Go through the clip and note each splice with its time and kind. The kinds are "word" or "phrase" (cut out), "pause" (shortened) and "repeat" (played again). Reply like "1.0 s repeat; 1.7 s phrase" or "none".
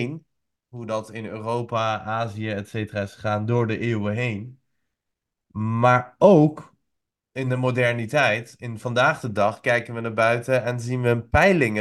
none

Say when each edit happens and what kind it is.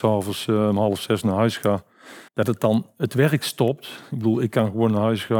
2.3 s pause

